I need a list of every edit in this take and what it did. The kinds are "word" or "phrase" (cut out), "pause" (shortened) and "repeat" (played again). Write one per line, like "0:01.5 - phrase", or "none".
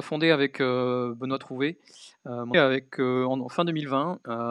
0:02.5 - word

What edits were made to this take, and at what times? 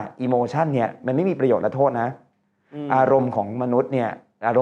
none

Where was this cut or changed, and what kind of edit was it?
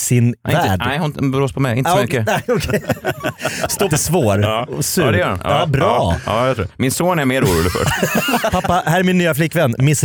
0:03.9 - phrase

